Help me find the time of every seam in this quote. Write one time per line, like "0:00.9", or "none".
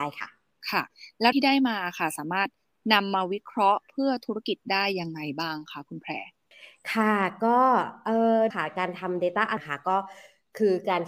0:01.3
0:08.5
0:09.6

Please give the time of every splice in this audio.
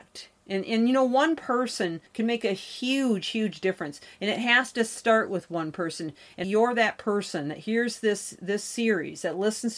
0:02.1
0:06.4

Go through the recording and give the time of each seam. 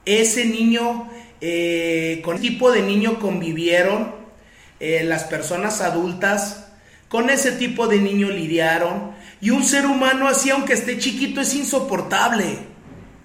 0:02.4

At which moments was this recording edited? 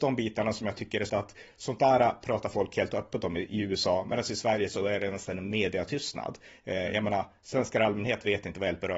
0:01.1

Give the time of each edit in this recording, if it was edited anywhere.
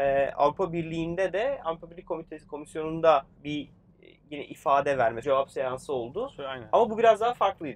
0:03.4
0:05.2

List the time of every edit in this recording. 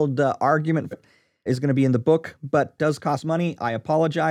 0:00.9
0:01.5
0:02.8

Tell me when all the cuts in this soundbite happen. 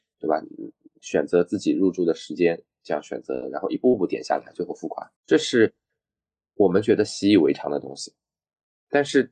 0:05.2

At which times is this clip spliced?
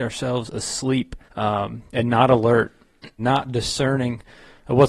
0:01.3
0:03.2

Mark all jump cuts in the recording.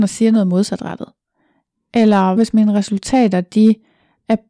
0:02.4

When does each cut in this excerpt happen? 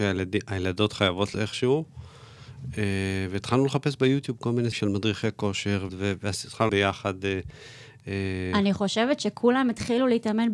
0:01.3
0:04.7
0:05.9
0:06.7

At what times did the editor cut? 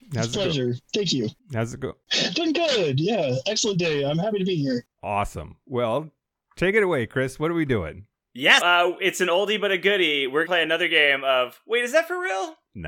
0:08.6
0:10.4

